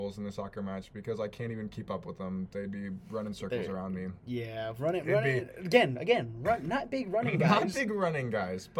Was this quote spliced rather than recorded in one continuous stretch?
no; 0 cuts

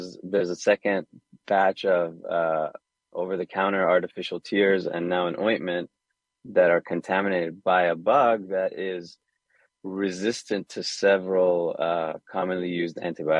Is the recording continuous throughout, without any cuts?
yes; 0 cuts

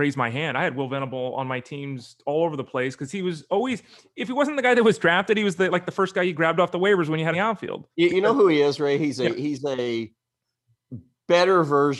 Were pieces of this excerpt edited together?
yes; 2 cuts; at 7.3 s, 7.9 s

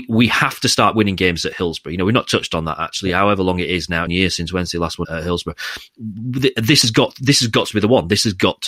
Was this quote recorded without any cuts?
no; 2 cuts; at 4.1 s, 5.0 s

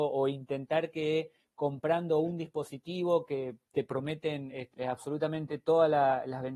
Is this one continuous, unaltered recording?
yes; 0 cuts

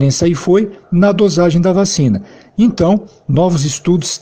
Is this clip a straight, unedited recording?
yes; 0 cuts

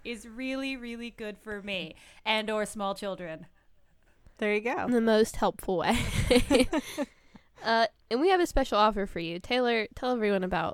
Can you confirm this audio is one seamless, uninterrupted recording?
no; 1 cut; at 4.3 s

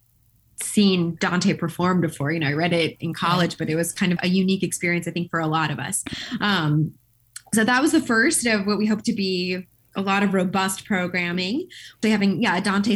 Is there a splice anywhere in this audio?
yes; 2 cuts; at 4.2 s, 12.0 s

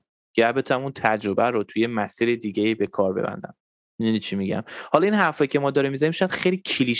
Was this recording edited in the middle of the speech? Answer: no; 0 cuts

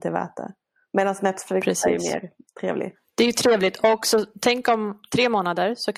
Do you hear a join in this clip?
no; 0 cuts

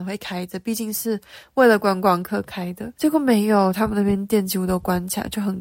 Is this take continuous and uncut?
no; 1 cut; at 2.9 s

